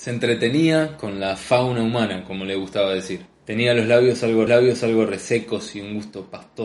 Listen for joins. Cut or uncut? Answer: cut